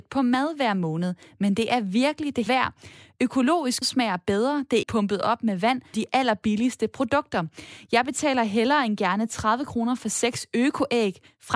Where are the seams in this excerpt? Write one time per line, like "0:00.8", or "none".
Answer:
0:02.5
0:03.8
0:04.8
0:05.9